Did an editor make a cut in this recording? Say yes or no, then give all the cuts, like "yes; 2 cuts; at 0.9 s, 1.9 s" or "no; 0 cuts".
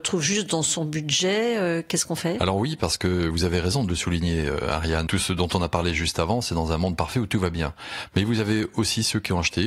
no; 0 cuts